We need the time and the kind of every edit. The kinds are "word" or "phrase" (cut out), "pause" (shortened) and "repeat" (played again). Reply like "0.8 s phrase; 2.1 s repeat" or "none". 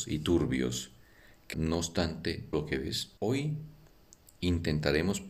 1.5 s word; 2.5 s word; 3.2 s pause

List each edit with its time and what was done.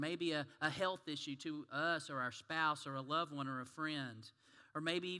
none

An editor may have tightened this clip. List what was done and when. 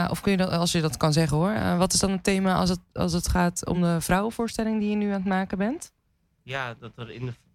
none

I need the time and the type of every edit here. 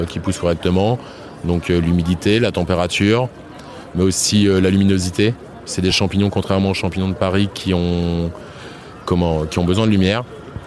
none

